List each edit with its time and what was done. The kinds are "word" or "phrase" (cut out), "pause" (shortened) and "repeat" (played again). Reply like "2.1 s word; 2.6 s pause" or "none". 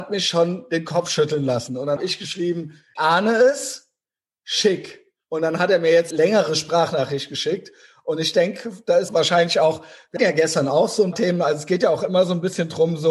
2.0 s word; 3.0 s word; 6.1 s word; 9.1 s word; 10.2 s word; 11.1 s word